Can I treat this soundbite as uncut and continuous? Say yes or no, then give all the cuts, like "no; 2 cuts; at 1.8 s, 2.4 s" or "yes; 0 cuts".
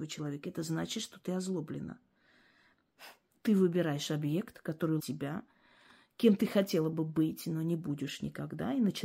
no; 1 cut; at 5.0 s